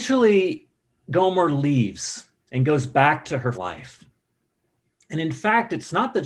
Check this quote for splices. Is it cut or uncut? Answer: cut